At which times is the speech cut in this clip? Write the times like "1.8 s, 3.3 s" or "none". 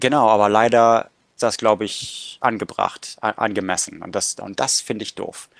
1.4 s